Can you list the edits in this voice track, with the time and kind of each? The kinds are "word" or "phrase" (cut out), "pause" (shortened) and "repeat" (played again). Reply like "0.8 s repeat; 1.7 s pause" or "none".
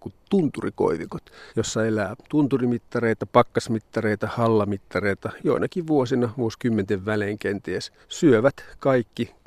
1.5 s pause; 5.4 s word; 8.0 s pause